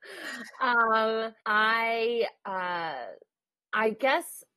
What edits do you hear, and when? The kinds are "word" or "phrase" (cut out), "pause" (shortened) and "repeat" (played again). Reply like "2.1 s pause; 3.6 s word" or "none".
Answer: 1.4 s pause; 3.5 s pause